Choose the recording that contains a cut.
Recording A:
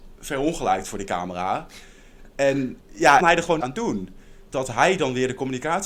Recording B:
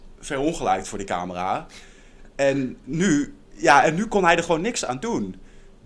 A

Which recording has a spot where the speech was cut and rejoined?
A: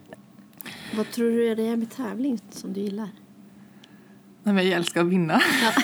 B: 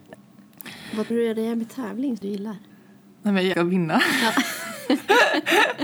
B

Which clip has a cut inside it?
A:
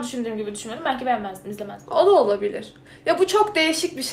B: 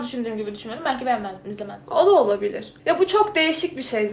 B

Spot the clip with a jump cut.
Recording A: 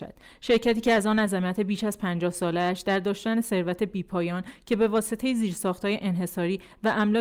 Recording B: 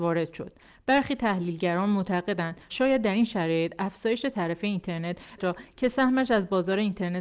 B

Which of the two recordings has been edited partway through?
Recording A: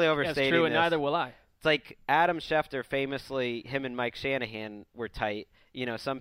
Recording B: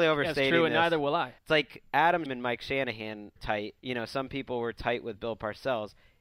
B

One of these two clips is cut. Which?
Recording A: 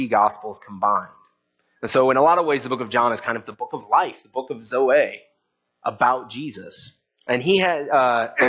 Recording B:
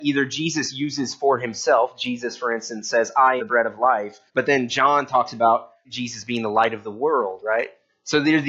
B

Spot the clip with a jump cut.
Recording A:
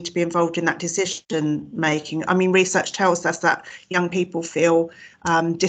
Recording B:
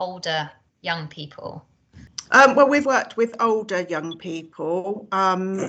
B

